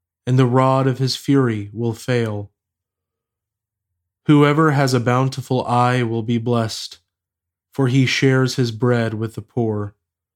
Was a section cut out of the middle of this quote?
no; 0 cuts

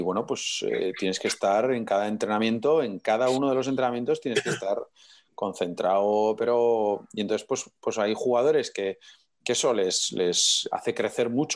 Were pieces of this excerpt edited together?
no; 0 cuts

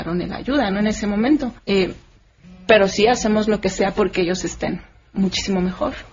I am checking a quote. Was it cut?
yes; 1 cut; at 1.6 s

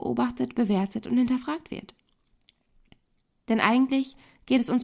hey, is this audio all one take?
yes; 0 cuts

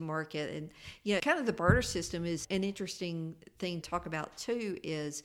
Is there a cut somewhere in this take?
yes; 3 cuts; at 1.2 s, 2.4 s, 3.8 s

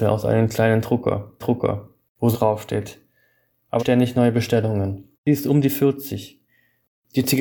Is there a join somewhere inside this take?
yes; 4 cuts; at 1.4 s, 2.3 s, 3.8 s, 5.1 s

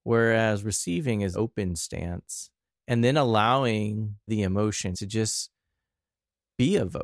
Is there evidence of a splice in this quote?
yes; 4 cuts; at 1.3 s, 2.7 s, 4.3 s, 4.9 s

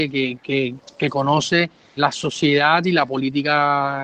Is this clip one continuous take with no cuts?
no; 1 cut; at 2.0 s

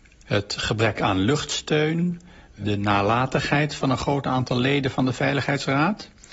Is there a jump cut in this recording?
no; 0 cuts

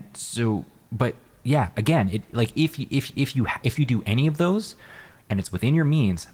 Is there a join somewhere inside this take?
no; 0 cuts

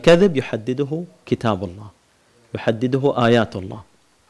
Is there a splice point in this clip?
no; 0 cuts

